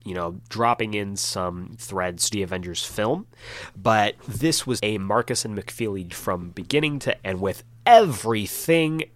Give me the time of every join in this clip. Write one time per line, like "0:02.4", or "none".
0:01.8
0:02.3
0:04.8
0:06.1
0:07.2